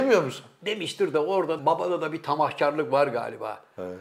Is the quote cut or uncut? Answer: cut